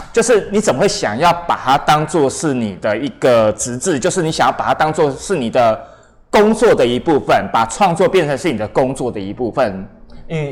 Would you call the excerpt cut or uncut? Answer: uncut